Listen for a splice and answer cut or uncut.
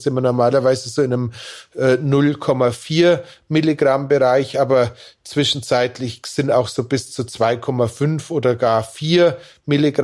uncut